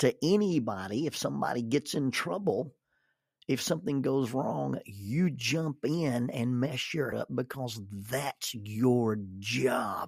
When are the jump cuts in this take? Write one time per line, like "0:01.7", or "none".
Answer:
0:07.1